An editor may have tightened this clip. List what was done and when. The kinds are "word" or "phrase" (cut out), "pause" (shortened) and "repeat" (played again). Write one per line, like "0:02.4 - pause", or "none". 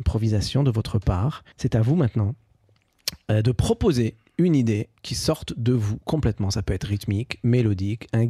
0:01.5 - pause
0:05.0 - pause